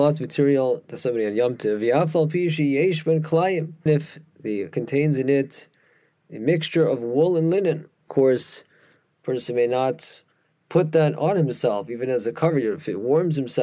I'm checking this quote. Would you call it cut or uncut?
cut